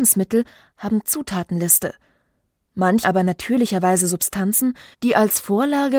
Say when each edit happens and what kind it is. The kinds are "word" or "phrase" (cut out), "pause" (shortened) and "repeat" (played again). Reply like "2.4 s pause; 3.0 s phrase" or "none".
1.0 s word; 3.0 s word; 4.9 s pause